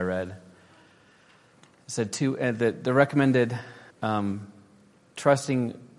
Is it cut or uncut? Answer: cut